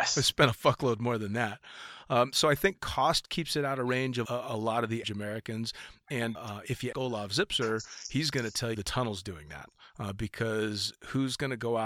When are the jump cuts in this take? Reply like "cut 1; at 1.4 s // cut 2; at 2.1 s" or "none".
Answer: cut 1; at 4.2 s // cut 2; at 5.0 s // cut 3; at 6.3 s // cut 4; at 6.9 s // cut 5; at 8.7 s